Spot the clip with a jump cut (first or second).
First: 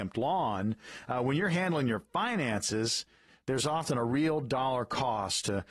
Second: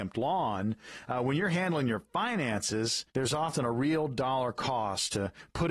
second